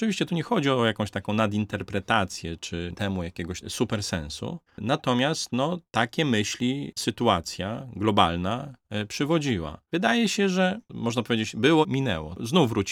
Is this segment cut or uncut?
cut